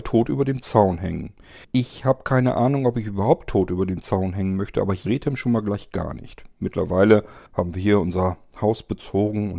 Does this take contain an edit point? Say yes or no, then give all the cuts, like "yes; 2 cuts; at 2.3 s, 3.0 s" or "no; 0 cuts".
yes; 3 cuts; at 1.6 s, 5.1 s, 7.5 s